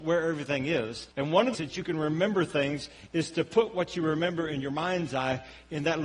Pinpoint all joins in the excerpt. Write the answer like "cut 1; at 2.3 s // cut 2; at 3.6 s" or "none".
cut 1; at 1.1 s // cut 2; at 1.5 s